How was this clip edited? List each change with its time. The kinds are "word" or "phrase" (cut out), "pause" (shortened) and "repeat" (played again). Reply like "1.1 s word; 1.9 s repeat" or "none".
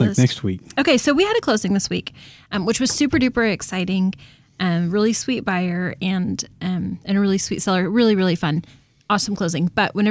none